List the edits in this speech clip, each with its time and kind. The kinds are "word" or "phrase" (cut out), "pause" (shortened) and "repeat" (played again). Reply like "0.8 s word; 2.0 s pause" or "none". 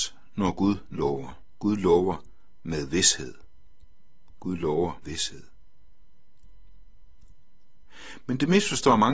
5.0 s word